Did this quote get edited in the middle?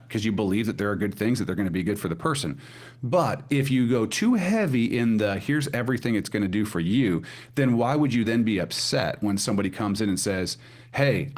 no; 0 cuts

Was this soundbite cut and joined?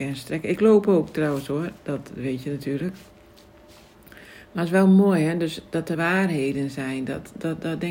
yes; 1 cut; at 5.9 s

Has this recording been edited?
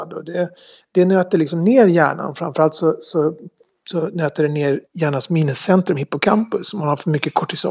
yes; 1 cut; at 4.9 s

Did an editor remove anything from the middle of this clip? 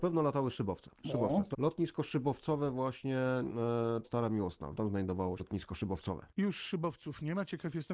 yes; 6 cuts; at 0.9 s, 1.5 s, 4.0 s, 4.7 s, 5.4 s, 6.3 s

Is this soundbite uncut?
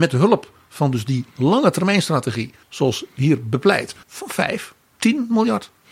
no; 2 cuts; at 2.6 s, 4.0 s

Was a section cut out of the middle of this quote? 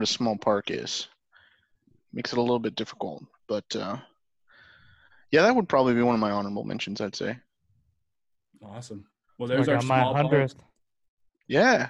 yes; 1 cut; at 2.0 s

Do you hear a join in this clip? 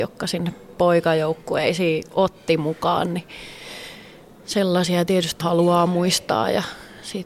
yes; 1 cut; at 5.4 s

